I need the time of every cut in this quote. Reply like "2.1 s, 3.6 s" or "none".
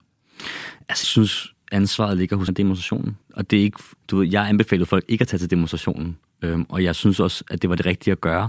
1.0 s, 2.5 s, 3.2 s, 4.0 s